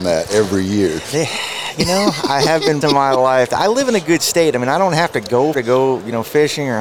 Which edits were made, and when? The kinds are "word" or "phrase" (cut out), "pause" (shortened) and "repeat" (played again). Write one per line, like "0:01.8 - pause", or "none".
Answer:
0:02.8 - word
0:05.5 - word